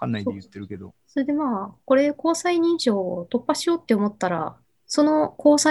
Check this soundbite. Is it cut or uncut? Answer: cut